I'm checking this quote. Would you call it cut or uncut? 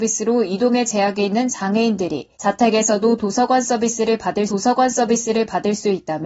cut